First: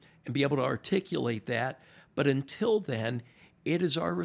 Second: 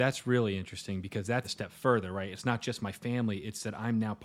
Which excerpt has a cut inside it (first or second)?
second